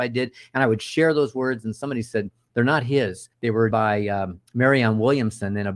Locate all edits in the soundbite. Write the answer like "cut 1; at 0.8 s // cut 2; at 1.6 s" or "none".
cut 1; at 3.3 s // cut 2; at 3.7 s // cut 3; at 4.5 s